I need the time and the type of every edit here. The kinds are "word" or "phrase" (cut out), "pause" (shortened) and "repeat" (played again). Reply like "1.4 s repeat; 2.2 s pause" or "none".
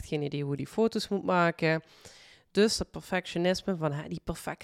none